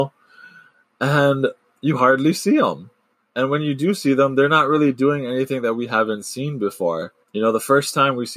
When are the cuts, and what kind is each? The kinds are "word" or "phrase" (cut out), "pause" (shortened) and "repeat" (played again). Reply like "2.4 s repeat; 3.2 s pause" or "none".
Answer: 1.6 s pause; 3.1 s pause; 7.2 s pause